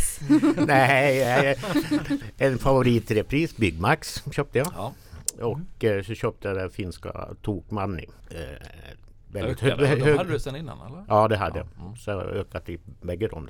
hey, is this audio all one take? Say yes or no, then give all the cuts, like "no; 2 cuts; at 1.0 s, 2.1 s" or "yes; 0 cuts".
yes; 0 cuts